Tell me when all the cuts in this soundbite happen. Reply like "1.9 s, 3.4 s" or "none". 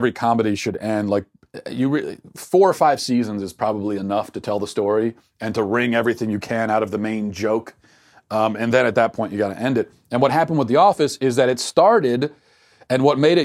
none